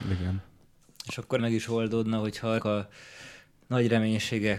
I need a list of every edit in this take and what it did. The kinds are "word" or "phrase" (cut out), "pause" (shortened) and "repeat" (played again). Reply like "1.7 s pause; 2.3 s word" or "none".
1.4 s word; 2.6 s word